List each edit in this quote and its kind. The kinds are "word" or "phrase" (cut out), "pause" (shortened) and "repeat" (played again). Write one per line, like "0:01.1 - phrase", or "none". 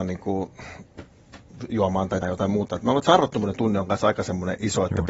0:02.2 - word